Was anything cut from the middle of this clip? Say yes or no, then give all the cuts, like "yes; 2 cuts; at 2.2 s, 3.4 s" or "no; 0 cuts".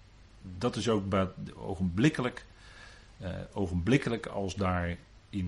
no; 0 cuts